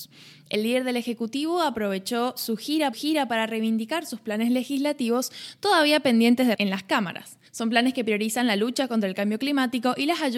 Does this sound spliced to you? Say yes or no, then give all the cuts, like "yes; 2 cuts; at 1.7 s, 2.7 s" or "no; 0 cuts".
yes; 3 cuts; at 2.9 s, 6.6 s, 7.5 s